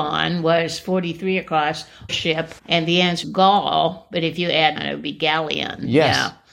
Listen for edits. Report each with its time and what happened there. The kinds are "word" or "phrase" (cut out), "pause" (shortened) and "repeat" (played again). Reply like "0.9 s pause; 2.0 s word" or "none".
2.1 s word; 2.6 s pause; 3.2 s word; 4.8 s phrase